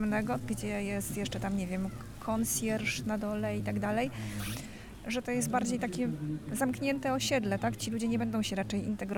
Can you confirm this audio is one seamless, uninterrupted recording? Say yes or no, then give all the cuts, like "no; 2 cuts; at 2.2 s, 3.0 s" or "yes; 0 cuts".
yes; 0 cuts